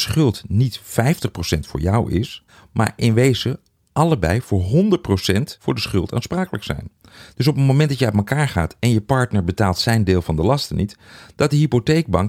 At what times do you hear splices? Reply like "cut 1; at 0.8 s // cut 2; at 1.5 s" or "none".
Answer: none